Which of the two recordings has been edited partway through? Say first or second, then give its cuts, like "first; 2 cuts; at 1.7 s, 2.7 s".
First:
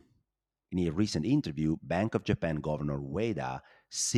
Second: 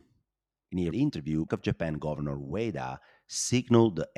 second; 2 cuts; at 0.9 s, 1.5 s